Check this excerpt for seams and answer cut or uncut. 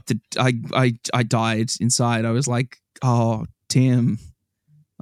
uncut